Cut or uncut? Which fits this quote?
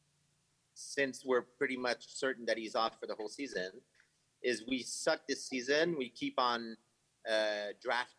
uncut